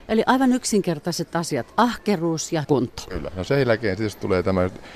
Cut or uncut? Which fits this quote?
cut